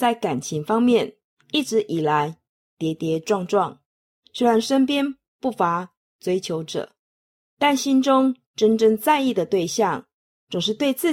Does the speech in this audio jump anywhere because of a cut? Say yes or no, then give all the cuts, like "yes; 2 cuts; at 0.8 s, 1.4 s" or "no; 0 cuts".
no; 0 cuts